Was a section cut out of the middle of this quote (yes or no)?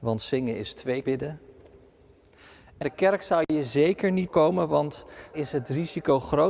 yes